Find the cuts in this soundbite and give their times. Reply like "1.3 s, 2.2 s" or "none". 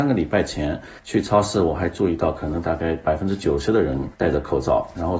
1.0 s, 4.1 s